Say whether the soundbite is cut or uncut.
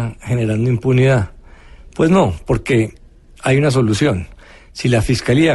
uncut